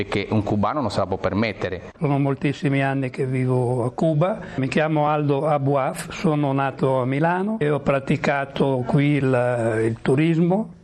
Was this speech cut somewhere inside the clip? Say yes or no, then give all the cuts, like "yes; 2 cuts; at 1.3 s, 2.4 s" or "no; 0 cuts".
no; 0 cuts